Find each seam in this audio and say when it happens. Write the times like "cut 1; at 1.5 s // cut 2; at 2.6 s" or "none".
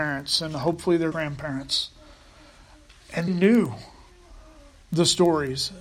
cut 1; at 1.1 s // cut 2; at 3.3 s